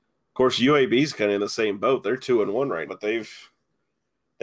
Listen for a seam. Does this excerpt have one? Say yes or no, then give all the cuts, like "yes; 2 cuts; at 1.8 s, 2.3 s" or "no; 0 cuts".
yes; 1 cut; at 2.9 s